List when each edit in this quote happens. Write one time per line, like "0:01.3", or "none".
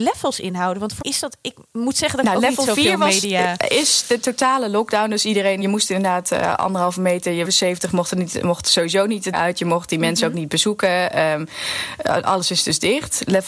0:01.0
0:05.6
0:07.4
0:09.3